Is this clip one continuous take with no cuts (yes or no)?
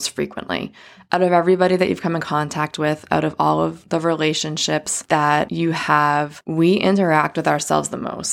yes